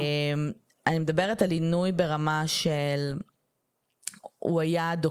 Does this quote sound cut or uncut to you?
uncut